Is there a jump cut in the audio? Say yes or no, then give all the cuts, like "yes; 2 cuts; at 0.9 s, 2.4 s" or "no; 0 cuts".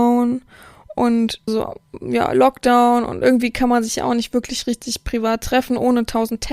yes; 1 cut; at 1.5 s